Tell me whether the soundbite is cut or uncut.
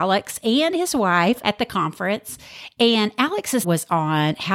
cut